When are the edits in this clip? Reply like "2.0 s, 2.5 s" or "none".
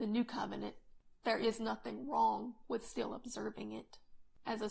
none